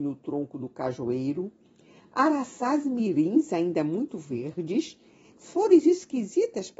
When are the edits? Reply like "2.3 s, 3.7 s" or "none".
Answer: none